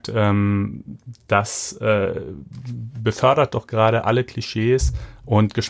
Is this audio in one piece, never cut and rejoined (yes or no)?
yes